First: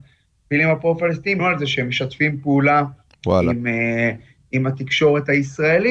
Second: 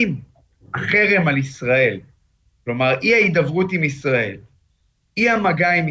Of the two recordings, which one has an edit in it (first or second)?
first